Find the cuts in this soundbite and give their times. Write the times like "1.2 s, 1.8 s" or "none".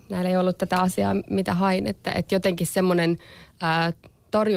none